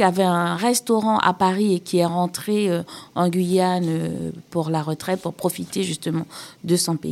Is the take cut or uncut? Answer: uncut